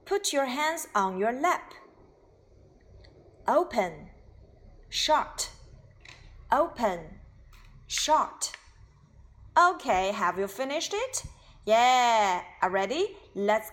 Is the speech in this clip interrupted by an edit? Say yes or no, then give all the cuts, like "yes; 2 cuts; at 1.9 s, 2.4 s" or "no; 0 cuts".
no; 0 cuts